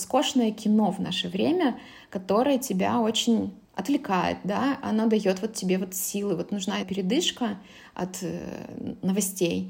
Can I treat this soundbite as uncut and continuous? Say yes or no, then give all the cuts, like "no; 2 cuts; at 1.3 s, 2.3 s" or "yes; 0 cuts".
no; 2 cuts; at 3.6 s, 6.8 s